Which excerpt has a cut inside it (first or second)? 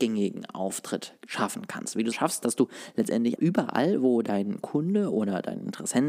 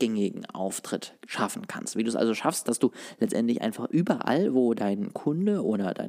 first